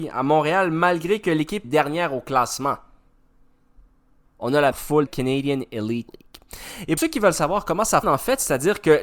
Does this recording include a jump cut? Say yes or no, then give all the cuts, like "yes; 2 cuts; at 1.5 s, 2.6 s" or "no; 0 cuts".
yes; 6 cuts; at 1.6 s, 4.7 s, 5.1 s, 6.1 s, 7.0 s, 8.0 s